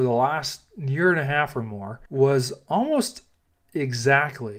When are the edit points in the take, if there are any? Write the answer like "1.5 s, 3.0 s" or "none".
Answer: 2.1 s